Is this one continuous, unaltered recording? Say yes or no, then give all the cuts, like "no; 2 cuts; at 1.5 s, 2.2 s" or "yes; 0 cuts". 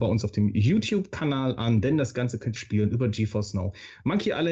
no; 1 cut; at 2.6 s